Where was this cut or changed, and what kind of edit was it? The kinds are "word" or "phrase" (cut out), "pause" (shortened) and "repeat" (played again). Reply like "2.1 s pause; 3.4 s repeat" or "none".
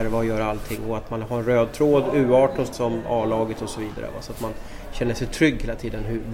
2.7 s phrase